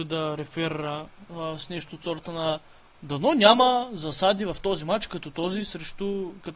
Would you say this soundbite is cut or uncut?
uncut